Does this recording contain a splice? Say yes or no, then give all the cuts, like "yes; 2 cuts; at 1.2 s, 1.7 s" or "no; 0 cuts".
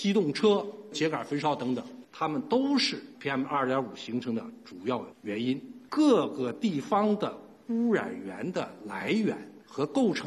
no; 0 cuts